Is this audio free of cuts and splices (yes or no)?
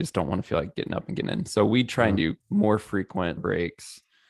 no